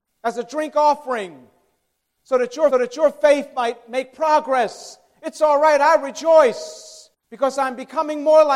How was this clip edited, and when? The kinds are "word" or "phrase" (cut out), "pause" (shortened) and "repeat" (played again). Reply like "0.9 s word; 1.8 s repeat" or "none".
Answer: 2.7 s repeat; 7.1 s pause